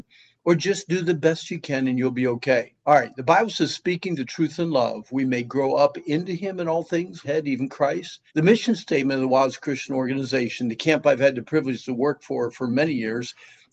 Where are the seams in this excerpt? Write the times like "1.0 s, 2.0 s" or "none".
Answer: 2.8 s, 7.2 s, 8.3 s